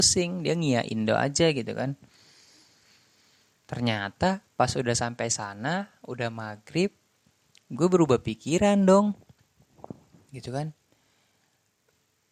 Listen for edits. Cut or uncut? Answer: uncut